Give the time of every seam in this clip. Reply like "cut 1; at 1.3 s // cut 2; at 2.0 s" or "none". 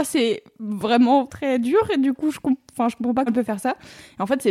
cut 1; at 1.3 s // cut 2; at 3.3 s

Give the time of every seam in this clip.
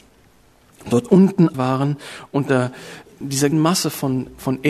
cut 1; at 1.5 s // cut 2; at 3.5 s

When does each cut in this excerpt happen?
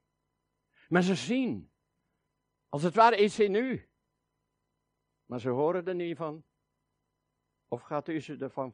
none

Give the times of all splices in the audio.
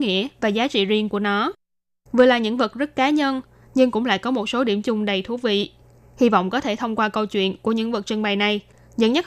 none

